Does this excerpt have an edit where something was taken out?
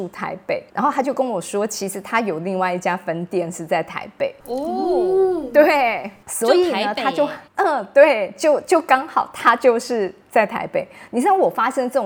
no; 0 cuts

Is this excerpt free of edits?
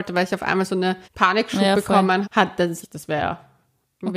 no; 3 cuts; at 1.0 s, 2.2 s, 2.8 s

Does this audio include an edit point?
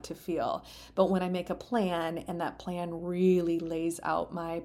no; 0 cuts

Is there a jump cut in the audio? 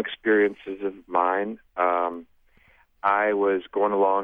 no; 0 cuts

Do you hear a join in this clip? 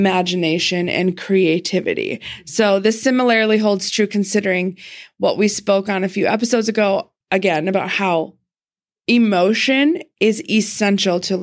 yes; 1 cut; at 7.2 s

